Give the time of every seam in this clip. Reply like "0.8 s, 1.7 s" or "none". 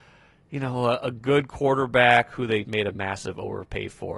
2.6 s